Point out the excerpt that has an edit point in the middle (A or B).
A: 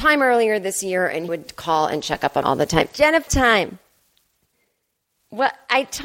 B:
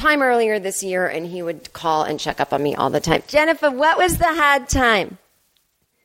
A